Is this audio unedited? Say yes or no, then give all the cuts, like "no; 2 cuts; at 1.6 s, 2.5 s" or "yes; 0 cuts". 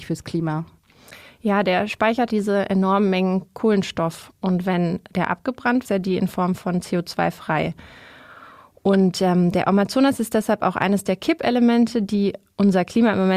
no; 2 cuts; at 2.3 s, 5.8 s